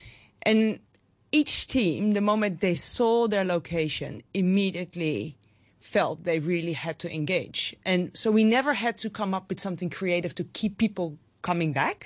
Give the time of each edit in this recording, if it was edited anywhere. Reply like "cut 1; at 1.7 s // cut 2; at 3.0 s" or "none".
none